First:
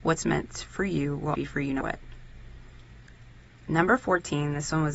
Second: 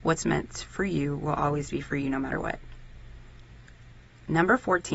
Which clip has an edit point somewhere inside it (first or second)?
first